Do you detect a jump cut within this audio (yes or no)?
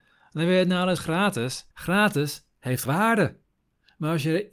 yes